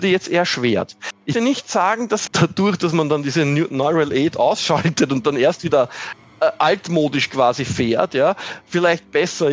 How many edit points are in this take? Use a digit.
2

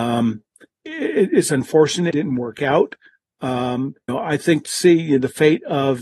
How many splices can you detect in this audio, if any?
3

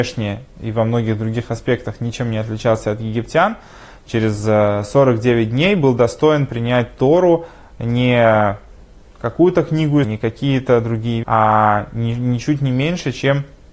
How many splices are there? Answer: 2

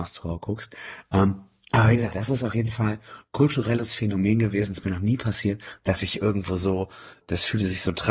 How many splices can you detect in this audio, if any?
1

